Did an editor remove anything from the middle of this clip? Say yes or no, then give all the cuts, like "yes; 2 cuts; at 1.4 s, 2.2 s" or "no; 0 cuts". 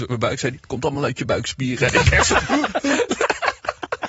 no; 0 cuts